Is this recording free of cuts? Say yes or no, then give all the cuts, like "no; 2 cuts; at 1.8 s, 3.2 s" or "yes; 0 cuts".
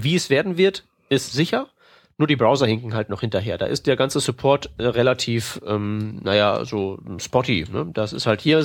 yes; 0 cuts